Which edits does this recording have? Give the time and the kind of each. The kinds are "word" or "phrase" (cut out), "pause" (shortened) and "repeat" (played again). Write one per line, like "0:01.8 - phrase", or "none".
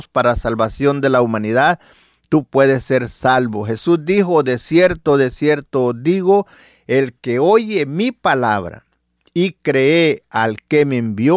none